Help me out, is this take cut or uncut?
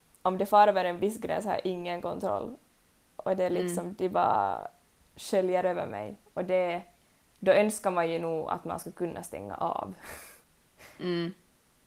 uncut